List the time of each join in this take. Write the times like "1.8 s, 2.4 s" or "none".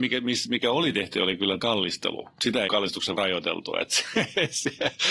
1.1 s, 1.6 s, 2.7 s, 3.2 s

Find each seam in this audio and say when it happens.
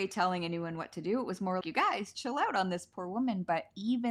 1.6 s, 2.1 s

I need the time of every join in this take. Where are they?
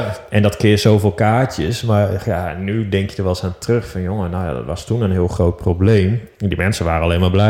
none

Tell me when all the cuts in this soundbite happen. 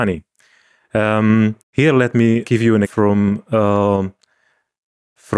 1.6 s, 2.4 s, 2.8 s

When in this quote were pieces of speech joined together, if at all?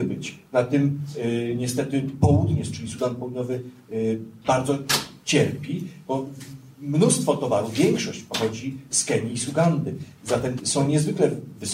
10.6 s

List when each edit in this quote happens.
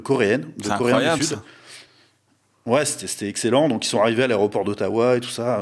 none

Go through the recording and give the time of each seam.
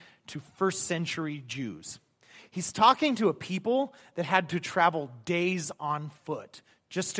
none

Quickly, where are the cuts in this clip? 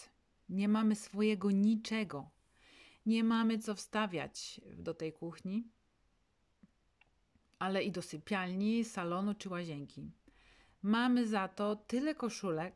none

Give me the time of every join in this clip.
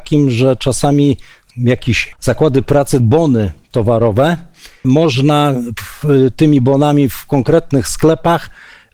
1.5 s, 2.1 s, 3.0 s, 4.8 s, 5.8 s

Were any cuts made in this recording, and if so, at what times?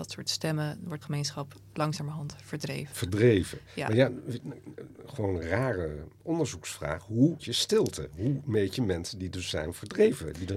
1.0 s, 7.4 s

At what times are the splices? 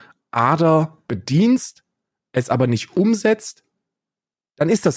none

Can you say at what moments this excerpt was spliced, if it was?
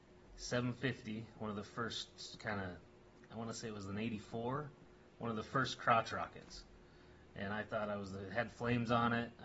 none

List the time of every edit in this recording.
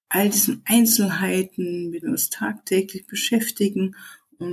2.0 s

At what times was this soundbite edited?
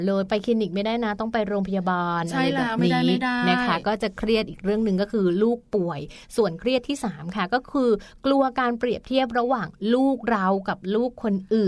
none

